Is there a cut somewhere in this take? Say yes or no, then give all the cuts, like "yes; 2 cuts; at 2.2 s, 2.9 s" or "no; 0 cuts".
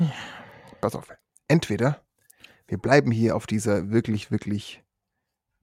no; 0 cuts